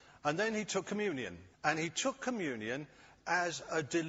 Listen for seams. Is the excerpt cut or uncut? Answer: cut